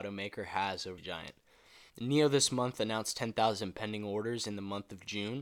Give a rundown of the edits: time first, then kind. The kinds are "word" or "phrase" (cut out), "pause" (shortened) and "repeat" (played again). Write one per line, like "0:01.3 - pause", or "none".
0:01.0 - phrase
0:01.9 - pause

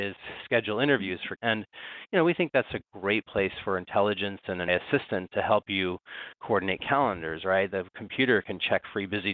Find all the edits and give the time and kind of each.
0:01.4 - word
0:04.7 - word

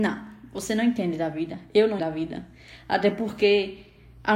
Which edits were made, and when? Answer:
0:02.0 - word

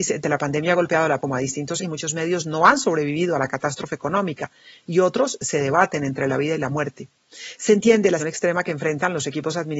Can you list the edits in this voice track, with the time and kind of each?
0:01.2 - word
0:01.8 - word
0:08.2 - word

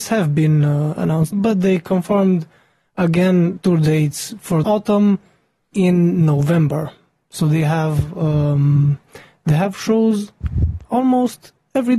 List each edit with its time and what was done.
0:01.3 - word
0:03.6 - word
0:04.6 - word
0:05.7 - word

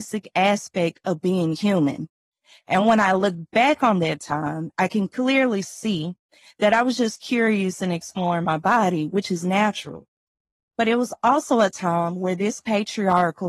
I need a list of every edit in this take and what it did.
none

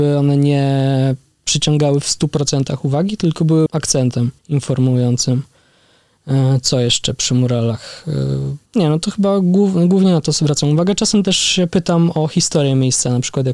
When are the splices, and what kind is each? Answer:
0:03.7 - word
0:04.4 - pause
0:08.7 - pause

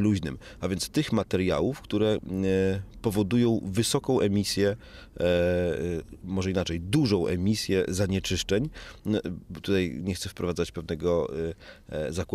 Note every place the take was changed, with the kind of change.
none

